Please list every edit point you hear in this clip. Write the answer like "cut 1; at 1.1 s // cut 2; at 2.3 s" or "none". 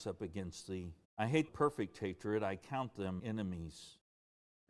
cut 1; at 1.0 s // cut 2; at 1.5 s // cut 3; at 3.2 s